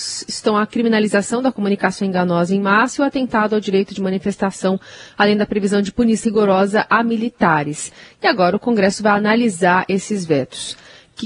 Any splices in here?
yes; 1 cut; at 6.2 s

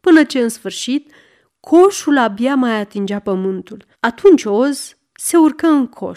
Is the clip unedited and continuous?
no; 1 cut; at 3.9 s

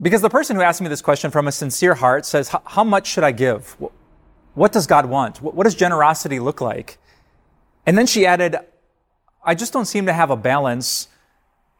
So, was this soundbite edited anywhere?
no; 0 cuts

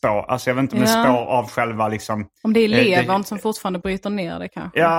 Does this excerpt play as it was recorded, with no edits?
yes; 0 cuts

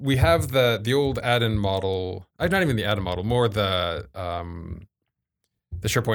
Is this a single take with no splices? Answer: no; 1 cut; at 2.3 s

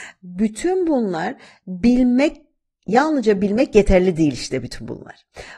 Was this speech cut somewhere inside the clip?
no; 0 cuts

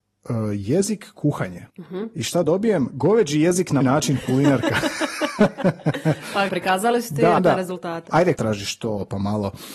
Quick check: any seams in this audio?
yes; 5 cuts; at 1.7 s, 3.8 s, 6.5 s, 7.4 s, 8.4 s

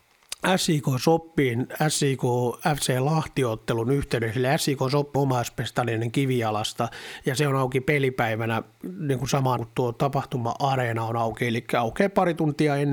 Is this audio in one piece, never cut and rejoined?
no; 2 cuts; at 5.1 s, 9.6 s

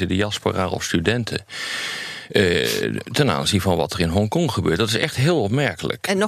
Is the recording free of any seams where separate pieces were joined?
yes; 0 cuts

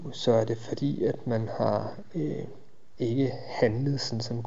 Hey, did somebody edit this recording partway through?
no; 0 cuts

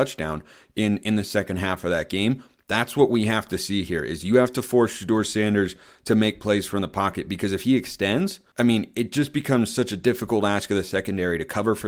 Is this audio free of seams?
no; 1 cut; at 8.5 s

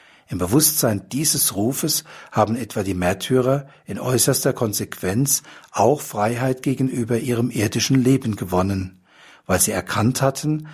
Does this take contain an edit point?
no; 0 cuts

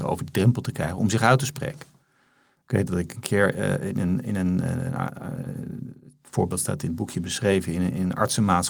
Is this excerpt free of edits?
yes; 0 cuts

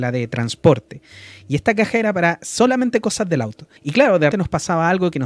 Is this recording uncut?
no; 2 cuts; at 3.8 s, 4.3 s

